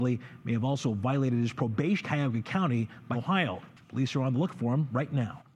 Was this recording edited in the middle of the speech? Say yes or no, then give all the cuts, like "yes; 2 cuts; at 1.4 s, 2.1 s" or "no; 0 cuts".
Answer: yes; 2 cuts; at 2.0 s, 3.1 s